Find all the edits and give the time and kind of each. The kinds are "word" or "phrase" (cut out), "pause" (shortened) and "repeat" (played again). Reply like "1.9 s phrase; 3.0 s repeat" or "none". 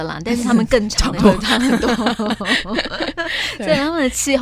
1.2 s word